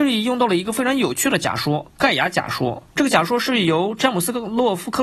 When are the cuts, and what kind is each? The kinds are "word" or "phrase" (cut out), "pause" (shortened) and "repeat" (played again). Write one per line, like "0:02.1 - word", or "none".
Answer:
0:02.9 - pause